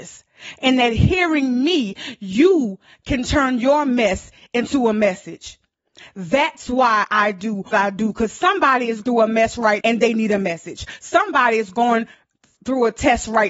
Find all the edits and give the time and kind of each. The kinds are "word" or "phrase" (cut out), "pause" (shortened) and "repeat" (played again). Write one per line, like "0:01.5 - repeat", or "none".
0:07.7 - word
0:09.0 - word
0:09.8 - word